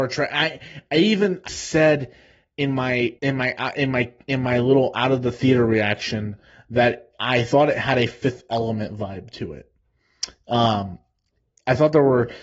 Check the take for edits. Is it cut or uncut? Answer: cut